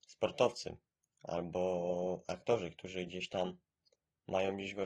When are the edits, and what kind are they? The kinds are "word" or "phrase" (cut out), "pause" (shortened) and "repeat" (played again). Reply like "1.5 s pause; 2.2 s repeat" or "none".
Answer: none